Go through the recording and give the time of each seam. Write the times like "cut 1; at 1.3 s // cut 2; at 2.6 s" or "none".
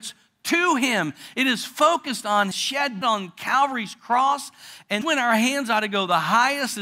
cut 1; at 2.5 s // cut 2; at 3.0 s // cut 3; at 5.0 s